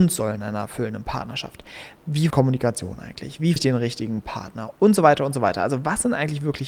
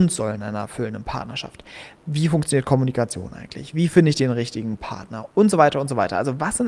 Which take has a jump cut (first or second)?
first